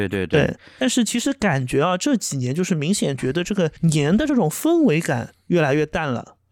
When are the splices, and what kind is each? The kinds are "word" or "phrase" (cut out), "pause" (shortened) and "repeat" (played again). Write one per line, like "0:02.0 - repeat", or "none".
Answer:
0:03.8 - pause